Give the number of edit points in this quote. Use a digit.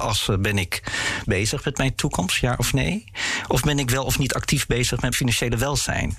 2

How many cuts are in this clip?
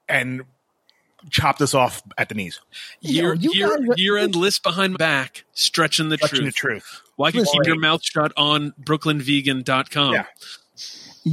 2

